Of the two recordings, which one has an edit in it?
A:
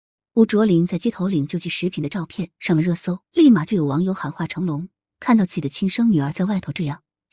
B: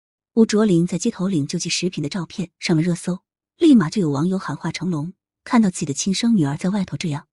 A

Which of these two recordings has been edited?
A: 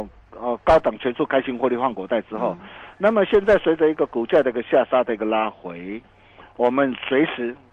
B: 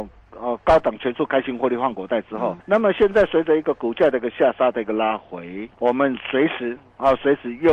B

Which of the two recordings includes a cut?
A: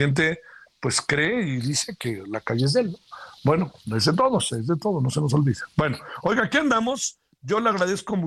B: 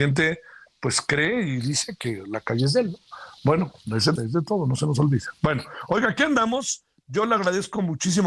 B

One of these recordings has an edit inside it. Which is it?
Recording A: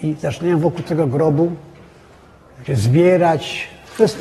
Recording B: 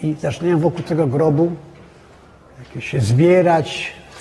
A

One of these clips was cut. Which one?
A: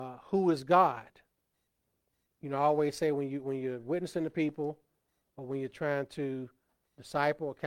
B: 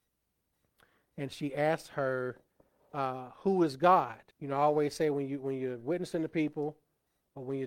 B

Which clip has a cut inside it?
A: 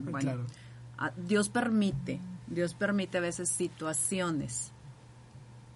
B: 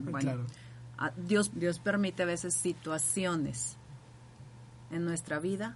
B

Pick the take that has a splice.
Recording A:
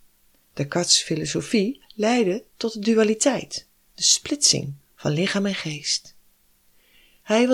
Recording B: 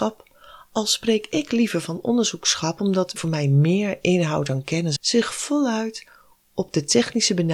B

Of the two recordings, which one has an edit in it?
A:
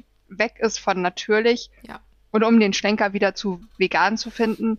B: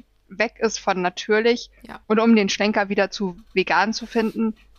B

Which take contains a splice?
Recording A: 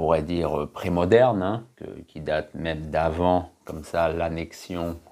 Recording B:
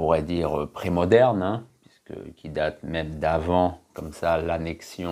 A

